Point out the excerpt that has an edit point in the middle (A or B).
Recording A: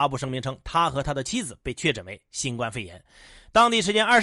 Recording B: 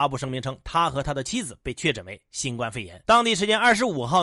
B